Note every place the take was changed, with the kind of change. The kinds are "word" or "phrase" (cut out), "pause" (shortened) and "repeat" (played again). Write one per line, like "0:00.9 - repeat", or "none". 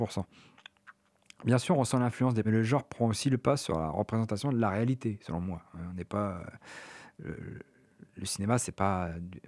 0:02.4 - phrase